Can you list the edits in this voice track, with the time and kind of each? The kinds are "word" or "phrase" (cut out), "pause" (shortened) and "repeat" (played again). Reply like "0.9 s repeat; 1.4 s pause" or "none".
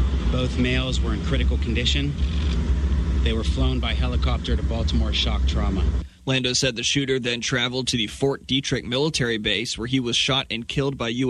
none